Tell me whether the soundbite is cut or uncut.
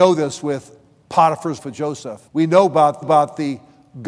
cut